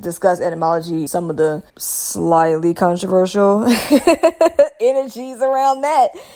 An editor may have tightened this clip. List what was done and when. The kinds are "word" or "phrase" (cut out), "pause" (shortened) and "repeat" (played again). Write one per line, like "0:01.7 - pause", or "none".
0:01.1 - word
0:01.7 - pause